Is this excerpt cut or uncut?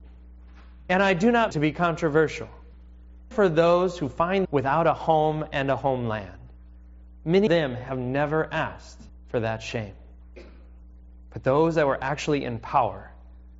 cut